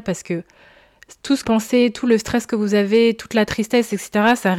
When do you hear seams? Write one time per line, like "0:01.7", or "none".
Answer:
0:01.4